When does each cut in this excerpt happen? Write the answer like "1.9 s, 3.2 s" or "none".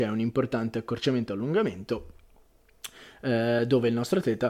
none